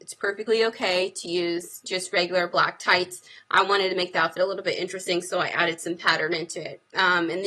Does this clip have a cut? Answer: no; 0 cuts

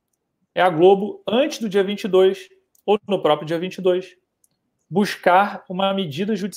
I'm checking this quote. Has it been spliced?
no; 0 cuts

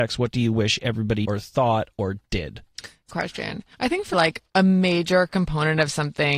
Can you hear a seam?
yes; 5 cuts; at 1.2 s, 3.1 s, 3.7 s, 4.1 s, 4.5 s

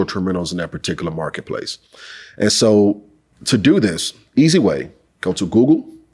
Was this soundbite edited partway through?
no; 0 cuts

